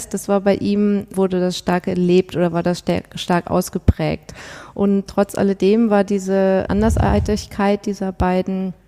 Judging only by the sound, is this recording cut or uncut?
cut